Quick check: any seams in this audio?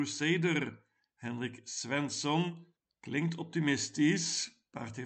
no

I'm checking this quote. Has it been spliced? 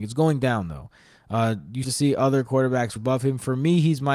yes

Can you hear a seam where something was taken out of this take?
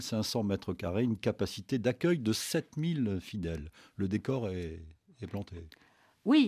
no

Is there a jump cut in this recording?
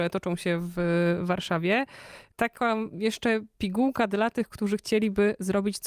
no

